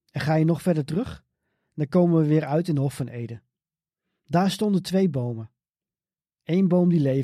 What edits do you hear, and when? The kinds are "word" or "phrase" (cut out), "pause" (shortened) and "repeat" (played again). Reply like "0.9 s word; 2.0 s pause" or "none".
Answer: none